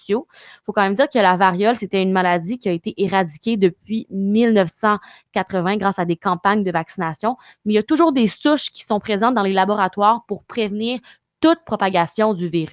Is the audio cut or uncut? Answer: uncut